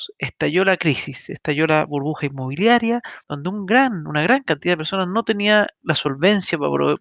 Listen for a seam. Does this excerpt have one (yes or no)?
yes